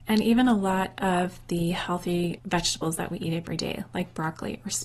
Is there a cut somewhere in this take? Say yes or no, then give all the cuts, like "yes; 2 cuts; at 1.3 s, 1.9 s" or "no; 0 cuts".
no; 0 cuts